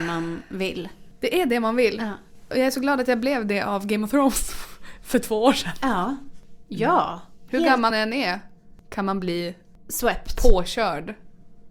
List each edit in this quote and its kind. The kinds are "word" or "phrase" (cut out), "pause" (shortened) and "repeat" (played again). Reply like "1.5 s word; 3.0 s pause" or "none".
7.9 s word